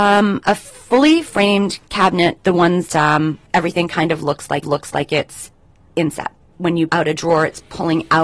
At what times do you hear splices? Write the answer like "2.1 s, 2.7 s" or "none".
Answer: 2.4 s, 2.9 s, 3.5 s, 4.6 s, 6.5 s, 6.9 s